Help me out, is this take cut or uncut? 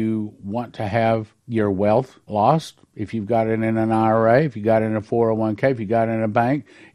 cut